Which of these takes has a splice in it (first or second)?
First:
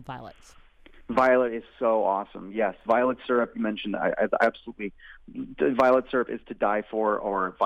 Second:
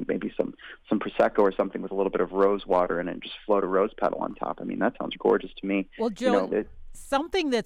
second